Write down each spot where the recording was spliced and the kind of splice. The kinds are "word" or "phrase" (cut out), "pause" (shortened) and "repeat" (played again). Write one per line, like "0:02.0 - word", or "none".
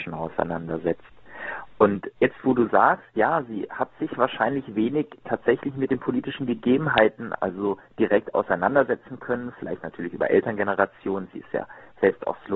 0:02.2 - pause